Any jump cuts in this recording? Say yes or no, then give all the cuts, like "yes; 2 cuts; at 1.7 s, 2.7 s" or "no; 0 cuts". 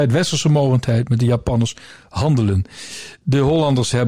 no; 0 cuts